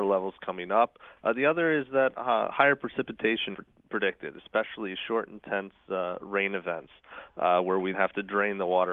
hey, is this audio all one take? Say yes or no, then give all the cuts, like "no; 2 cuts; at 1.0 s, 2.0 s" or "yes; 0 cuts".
no; 2 cuts; at 3.5 s, 7.9 s